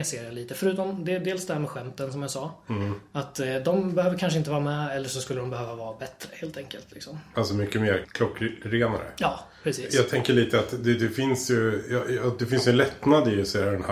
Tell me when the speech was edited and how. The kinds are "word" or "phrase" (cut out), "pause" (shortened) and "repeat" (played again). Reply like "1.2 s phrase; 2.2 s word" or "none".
none